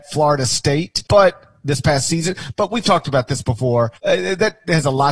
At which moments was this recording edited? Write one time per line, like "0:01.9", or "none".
0:01.1
0:04.0